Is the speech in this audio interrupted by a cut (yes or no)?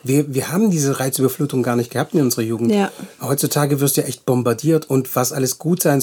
no